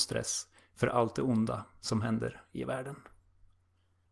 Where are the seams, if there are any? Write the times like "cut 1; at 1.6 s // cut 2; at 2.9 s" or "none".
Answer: none